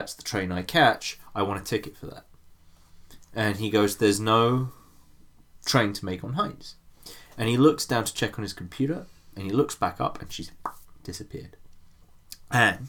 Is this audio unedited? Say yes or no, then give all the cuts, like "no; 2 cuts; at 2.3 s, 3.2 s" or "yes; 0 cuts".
yes; 0 cuts